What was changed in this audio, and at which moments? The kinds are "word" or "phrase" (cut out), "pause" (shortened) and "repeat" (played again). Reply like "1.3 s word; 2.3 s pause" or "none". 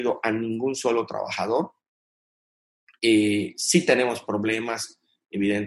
none